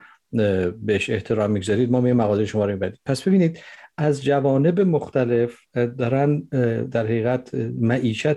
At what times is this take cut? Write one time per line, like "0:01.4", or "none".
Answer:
0:05.7

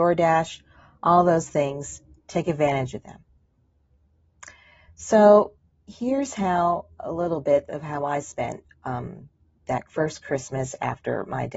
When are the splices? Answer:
none

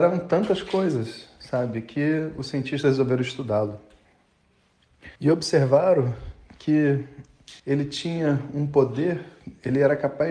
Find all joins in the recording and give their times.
0:05.2
0:07.6

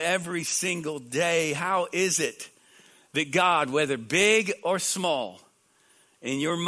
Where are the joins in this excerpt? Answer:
none

